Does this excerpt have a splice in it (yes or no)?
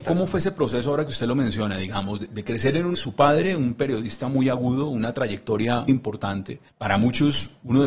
yes